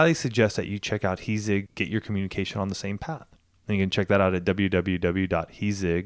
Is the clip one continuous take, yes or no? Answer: no